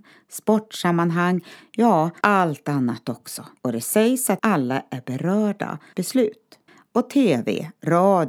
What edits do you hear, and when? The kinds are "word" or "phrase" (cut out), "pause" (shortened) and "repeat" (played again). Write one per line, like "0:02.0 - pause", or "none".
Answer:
0:02.2 - word
0:03.6 - pause
0:04.4 - word
0:05.9 - phrase
0:06.7 - pause